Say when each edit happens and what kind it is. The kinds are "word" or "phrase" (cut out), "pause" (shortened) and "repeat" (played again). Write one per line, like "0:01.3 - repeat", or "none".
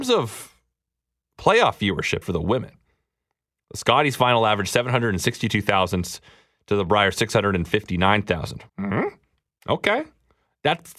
0:02.2 - phrase
0:08.7 - pause